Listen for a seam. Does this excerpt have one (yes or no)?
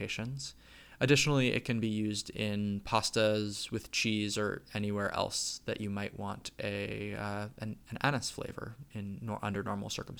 yes